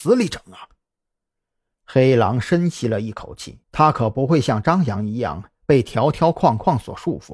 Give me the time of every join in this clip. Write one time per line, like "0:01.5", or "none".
0:03.6